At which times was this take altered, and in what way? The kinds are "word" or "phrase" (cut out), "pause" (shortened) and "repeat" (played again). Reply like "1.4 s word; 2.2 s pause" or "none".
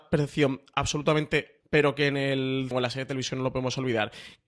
1.6 s word; 2.7 s word